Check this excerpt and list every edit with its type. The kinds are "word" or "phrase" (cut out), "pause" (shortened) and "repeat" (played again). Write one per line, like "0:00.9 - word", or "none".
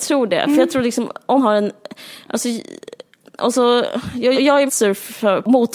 0:01.4 - word
0:04.3 - word
0:04.7 - word